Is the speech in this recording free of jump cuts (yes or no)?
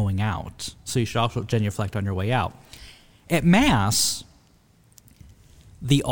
yes